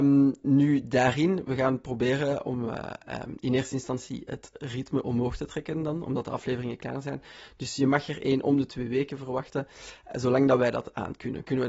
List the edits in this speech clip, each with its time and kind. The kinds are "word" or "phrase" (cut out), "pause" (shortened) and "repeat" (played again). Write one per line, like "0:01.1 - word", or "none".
none